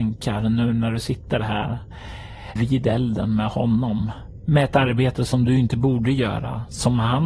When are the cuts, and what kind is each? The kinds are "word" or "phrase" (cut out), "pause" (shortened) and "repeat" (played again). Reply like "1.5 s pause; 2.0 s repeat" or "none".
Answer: 2.6 s word